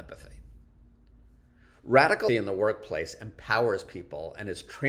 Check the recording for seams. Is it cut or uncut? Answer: cut